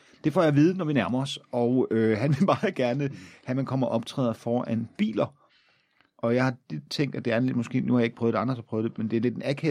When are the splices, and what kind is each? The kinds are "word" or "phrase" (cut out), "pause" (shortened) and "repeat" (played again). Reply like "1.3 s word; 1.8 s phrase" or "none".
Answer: none